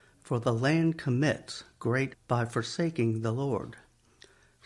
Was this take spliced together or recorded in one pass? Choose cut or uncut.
cut